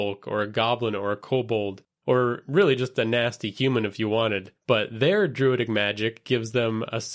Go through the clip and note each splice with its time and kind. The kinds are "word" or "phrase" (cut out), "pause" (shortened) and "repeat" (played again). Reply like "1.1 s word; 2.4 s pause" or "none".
4.6 s pause